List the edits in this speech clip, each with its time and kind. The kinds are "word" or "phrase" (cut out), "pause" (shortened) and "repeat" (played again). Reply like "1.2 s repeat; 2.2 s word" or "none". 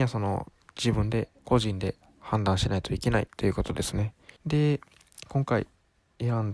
1.4 s pause; 4.4 s pause